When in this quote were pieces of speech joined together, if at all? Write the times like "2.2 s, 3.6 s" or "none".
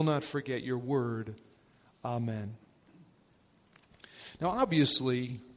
none